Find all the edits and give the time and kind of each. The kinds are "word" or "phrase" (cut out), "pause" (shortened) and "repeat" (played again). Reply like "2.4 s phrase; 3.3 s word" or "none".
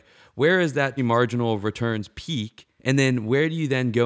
1.0 s word; 2.8 s pause